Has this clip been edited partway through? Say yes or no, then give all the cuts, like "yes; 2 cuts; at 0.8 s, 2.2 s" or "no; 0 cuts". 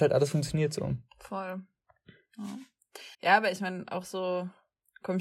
yes; 1 cut; at 3.1 s